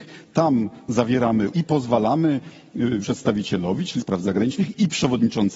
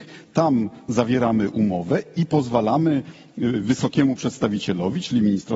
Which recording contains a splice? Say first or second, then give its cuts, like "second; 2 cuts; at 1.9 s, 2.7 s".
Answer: first; 3 cuts; at 1.5 s, 3.0 s, 4.0 s